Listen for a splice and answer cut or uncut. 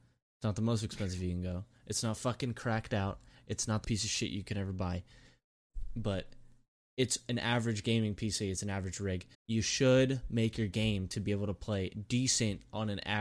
cut